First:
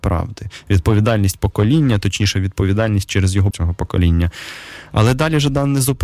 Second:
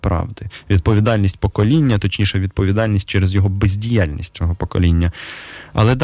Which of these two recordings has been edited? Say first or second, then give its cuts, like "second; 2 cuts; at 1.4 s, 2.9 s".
first; 1 cut; at 3.5 s